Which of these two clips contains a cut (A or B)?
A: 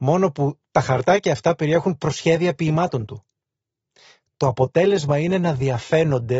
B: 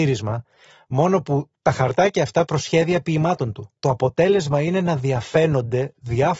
B